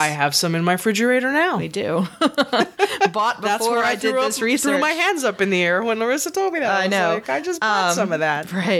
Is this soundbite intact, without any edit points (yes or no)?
yes